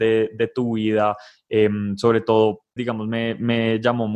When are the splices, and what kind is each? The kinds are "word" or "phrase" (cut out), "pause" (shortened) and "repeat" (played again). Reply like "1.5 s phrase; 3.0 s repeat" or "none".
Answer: 2.8 s word